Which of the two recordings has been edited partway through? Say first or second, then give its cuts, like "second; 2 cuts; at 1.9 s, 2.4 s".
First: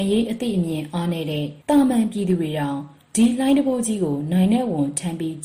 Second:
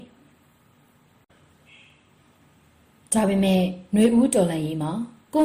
first; 1 cut; at 1.6 s